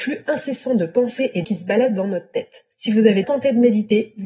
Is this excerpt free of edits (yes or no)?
no